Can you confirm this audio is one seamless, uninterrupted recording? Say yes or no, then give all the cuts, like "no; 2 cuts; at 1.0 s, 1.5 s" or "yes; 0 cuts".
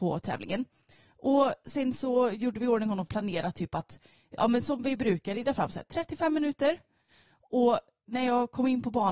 no; 1 cut; at 3.1 s